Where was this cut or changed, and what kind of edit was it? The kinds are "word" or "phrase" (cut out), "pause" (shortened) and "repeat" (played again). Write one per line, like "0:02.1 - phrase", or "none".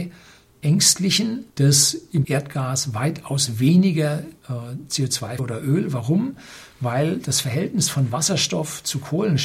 0:01.5 - pause
0:02.2 - word
0:04.4 - pause
0:05.4 - phrase